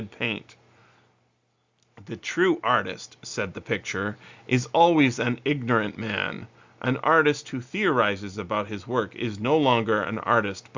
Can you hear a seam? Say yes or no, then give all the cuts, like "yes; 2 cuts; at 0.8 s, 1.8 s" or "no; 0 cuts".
no; 0 cuts